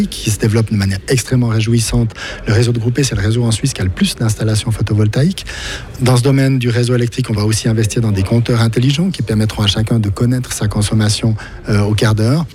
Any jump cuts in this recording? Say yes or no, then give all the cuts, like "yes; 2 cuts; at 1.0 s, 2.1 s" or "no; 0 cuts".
no; 0 cuts